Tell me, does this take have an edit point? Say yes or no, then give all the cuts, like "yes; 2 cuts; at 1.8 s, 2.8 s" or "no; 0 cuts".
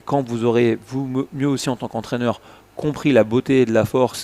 no; 0 cuts